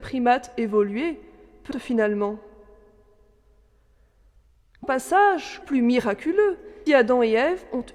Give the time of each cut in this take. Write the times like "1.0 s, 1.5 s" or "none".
1.7 s, 4.8 s, 5.6 s, 6.9 s